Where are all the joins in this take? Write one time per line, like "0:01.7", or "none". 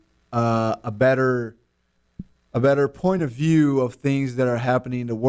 none